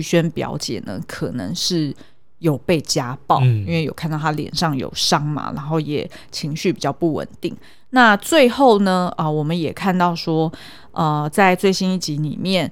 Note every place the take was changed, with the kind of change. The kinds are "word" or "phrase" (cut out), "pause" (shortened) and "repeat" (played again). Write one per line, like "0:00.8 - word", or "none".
none